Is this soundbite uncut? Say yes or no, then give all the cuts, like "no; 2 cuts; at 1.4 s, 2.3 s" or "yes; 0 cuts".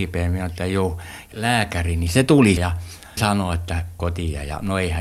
no; 4 cuts; at 1.3 s, 2.6 s, 3.2 s, 4.0 s